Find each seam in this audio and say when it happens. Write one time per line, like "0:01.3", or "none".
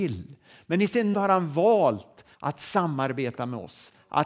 0:01.1
0:02.3